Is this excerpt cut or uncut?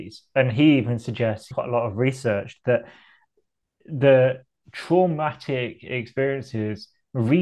cut